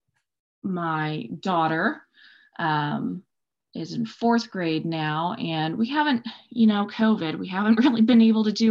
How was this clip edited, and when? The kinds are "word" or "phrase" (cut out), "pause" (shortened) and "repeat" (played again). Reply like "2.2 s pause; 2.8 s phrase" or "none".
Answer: none